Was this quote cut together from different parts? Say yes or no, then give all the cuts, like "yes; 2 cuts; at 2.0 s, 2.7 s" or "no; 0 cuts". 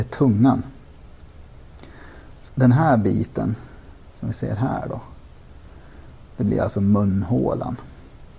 yes; 1 cut; at 2.5 s